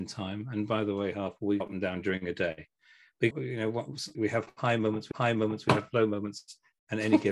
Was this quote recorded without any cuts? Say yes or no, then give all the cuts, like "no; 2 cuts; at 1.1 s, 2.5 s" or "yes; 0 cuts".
no; 4 cuts; at 1.6 s, 3.3 s, 4.1 s, 5.1 s